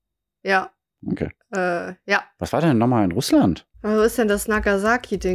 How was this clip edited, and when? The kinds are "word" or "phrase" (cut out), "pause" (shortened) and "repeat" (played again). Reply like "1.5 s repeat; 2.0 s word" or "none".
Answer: 3.7 s pause